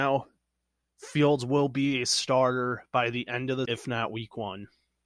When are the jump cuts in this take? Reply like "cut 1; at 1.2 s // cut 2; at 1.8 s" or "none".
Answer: cut 1; at 3.6 s